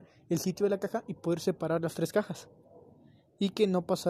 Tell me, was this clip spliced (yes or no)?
no